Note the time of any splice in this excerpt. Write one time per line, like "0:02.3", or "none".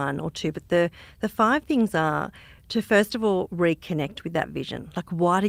none